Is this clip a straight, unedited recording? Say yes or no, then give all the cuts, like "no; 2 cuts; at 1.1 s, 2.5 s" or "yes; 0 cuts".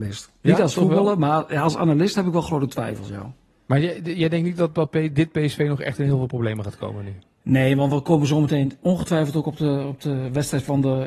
yes; 0 cuts